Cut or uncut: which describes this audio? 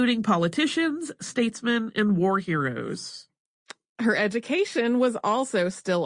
uncut